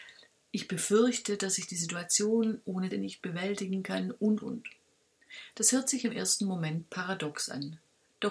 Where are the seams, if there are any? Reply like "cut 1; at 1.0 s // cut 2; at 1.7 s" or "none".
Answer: cut 1; at 2.9 s // cut 2; at 4.4 s